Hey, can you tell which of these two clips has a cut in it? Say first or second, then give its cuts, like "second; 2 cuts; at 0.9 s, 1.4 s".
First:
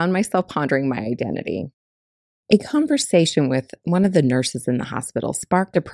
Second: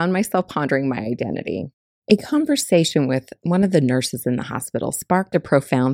second; 1 cut; at 1.9 s